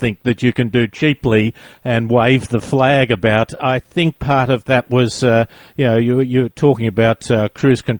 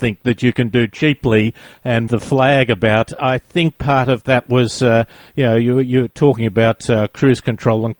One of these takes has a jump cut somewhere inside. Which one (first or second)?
second